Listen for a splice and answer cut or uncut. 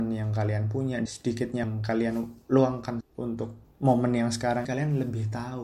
cut